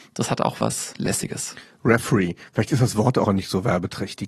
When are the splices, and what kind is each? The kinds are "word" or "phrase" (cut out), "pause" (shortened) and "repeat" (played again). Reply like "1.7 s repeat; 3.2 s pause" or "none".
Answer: 3.3 s word